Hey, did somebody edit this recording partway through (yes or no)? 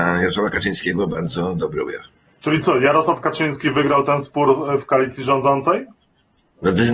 yes